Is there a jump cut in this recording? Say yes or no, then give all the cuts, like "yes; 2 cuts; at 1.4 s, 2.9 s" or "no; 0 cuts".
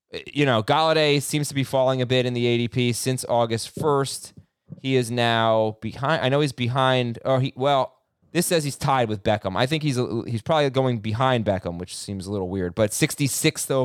yes; 1 cut; at 8.2 s